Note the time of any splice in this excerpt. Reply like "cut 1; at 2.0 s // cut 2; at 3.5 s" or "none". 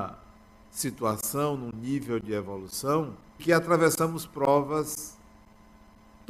cut 1; at 3.4 s

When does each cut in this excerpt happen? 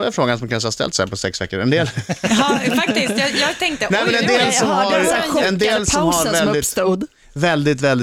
none

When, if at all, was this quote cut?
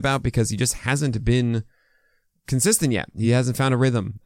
none

